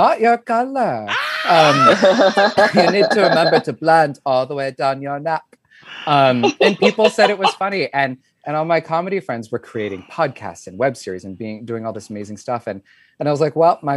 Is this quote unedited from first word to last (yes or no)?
yes